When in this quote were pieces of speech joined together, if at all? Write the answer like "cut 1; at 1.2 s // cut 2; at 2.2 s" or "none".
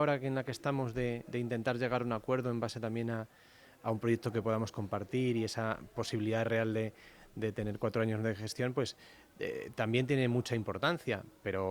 none